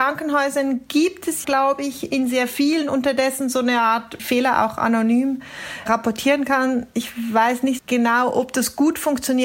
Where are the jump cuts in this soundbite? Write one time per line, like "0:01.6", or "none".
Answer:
0:01.4
0:04.2
0:07.8